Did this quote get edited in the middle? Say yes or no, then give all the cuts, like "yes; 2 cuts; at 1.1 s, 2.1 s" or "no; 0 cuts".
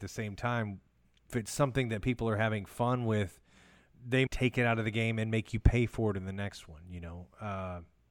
yes; 2 cuts; at 1.3 s, 4.3 s